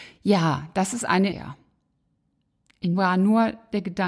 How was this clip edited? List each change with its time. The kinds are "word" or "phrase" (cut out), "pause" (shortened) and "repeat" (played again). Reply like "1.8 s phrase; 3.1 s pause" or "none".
1.3 s phrase; 2.9 s word